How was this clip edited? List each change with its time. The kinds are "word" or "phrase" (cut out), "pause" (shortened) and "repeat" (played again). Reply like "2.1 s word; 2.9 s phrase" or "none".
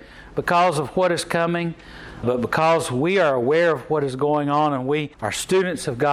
2.2 s word; 5.1 s pause